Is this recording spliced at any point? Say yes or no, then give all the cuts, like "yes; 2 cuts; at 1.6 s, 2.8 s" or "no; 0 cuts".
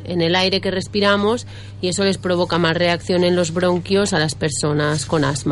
no; 0 cuts